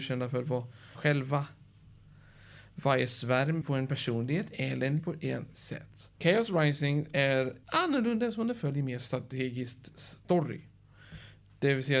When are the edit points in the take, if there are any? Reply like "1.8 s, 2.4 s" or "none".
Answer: 1.0 s, 3.6 s, 5.0 s, 5.5 s, 6.1 s, 7.6 s